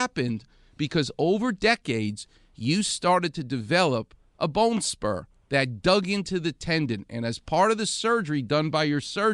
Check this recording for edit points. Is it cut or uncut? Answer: uncut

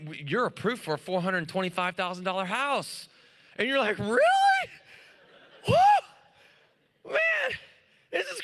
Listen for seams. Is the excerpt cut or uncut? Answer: uncut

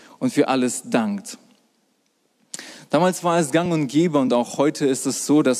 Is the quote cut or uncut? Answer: uncut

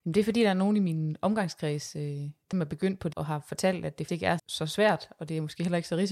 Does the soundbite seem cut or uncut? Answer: cut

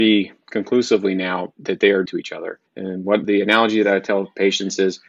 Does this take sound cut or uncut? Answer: cut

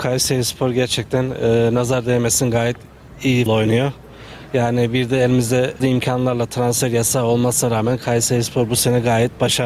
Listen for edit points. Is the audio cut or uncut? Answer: cut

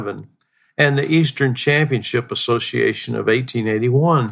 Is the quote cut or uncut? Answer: uncut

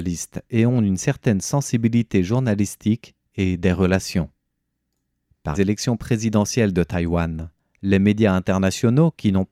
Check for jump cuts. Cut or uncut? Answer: cut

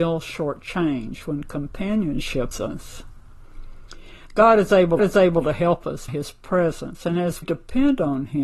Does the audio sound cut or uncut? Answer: cut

